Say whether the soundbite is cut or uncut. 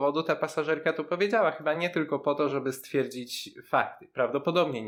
uncut